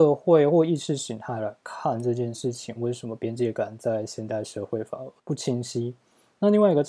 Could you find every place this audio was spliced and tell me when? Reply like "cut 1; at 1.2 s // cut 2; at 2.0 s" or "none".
cut 1; at 5.2 s